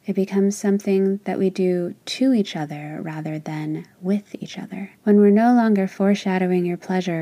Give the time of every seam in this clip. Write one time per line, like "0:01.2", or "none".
0:05.0